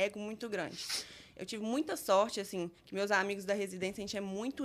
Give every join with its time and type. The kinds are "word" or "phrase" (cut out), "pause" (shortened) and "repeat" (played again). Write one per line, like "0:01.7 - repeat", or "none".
0:02.8 - pause